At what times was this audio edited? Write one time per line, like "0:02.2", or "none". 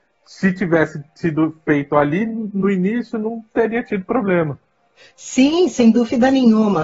none